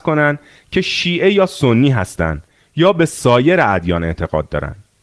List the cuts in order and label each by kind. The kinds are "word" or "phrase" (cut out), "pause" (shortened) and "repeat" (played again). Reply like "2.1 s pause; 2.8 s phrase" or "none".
none